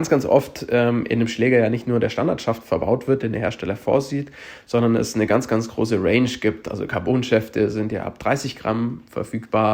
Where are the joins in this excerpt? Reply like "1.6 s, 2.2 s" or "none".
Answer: none